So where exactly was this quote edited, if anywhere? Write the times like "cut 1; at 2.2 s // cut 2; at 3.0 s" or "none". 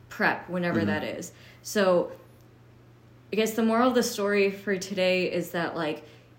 none